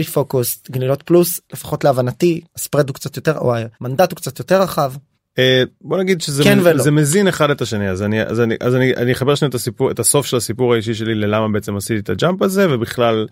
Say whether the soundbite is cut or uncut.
cut